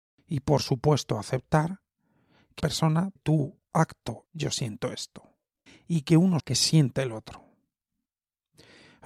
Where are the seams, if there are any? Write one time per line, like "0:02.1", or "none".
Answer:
0:02.6
0:03.2
0:04.3
0:05.7
0:06.4